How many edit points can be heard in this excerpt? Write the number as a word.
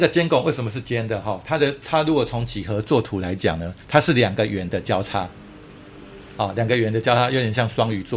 one